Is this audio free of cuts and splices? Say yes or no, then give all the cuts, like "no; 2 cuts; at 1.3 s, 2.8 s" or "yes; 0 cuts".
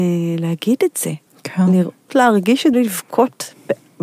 no; 3 cuts; at 1.3 s, 2.1 s, 2.7 s